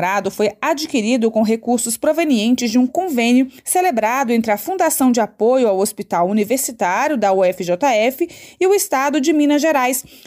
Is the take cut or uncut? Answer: cut